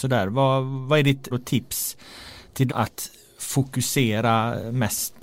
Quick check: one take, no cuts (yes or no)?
no